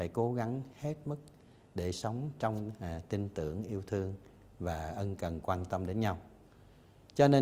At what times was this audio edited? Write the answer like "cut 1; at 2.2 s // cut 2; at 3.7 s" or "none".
none